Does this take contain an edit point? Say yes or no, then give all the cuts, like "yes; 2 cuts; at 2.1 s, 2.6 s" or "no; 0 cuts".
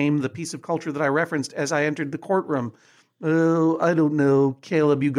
no; 0 cuts